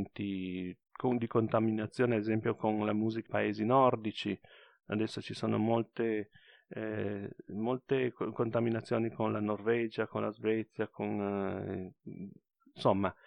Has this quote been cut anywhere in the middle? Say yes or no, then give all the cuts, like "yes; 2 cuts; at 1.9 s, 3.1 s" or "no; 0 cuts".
yes; 1 cut; at 3.3 s